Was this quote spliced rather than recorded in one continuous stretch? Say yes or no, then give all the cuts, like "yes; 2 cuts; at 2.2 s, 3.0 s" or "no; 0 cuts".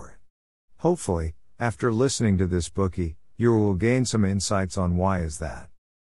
no; 0 cuts